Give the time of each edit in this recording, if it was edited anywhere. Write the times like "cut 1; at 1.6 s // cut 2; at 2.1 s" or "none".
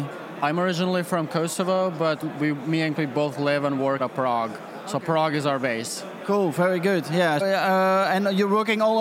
cut 1; at 2.2 s // cut 2; at 3.0 s // cut 3; at 4.0 s // cut 4; at 7.4 s